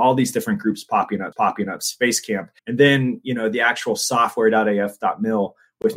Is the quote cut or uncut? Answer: cut